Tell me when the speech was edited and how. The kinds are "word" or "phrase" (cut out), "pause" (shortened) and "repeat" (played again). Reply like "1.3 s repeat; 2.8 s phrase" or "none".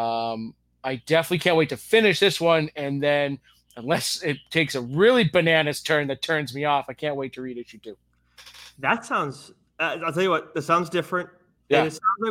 none